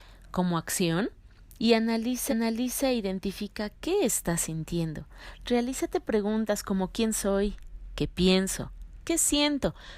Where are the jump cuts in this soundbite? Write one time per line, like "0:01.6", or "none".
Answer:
0:01.6
0:02.3